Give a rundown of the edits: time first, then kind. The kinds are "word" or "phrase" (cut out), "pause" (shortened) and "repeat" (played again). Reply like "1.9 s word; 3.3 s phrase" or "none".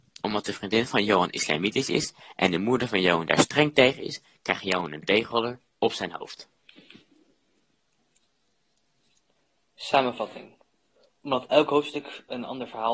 none